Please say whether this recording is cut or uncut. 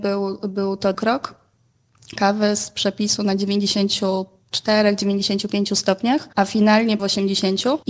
cut